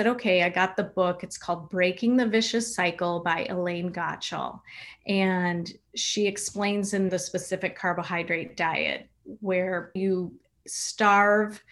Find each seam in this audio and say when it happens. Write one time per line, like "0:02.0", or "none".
0:07.1
0:10.0

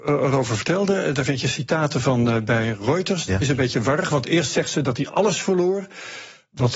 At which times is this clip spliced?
none

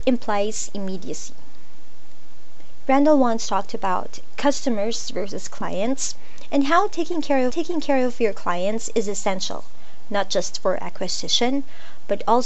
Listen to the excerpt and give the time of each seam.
0:07.5

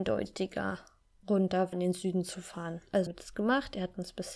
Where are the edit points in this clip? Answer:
0:01.7
0:03.1

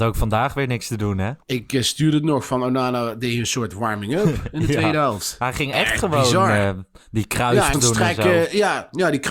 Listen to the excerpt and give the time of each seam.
0:01.4
0:07.0
0:07.7

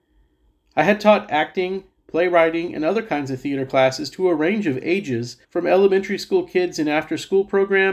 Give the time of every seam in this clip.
0:05.4

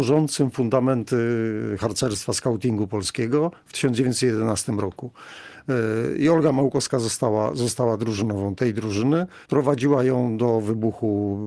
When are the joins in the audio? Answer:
0:09.4

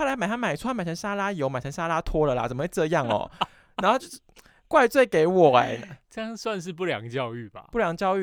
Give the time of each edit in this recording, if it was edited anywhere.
none

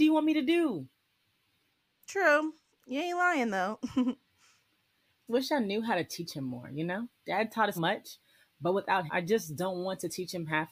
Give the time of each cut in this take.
0:05.3
0:07.8
0:09.1

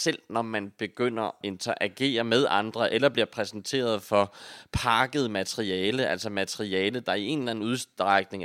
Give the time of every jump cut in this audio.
0:01.4

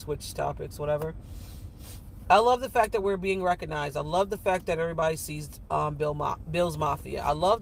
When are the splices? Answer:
none

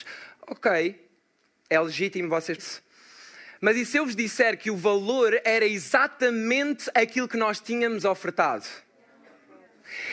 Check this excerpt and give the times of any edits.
0:02.6

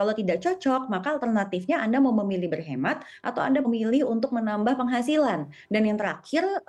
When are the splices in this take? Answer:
0:03.6

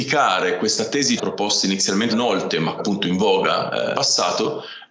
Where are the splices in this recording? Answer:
0:01.2
0:02.1
0:02.8
0:03.9

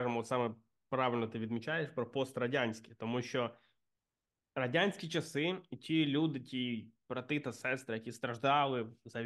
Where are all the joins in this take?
none

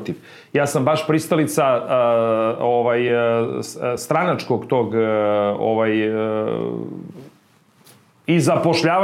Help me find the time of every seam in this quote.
none

